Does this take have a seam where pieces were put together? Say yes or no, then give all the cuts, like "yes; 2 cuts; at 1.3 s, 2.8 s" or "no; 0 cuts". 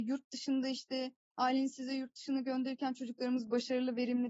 no; 0 cuts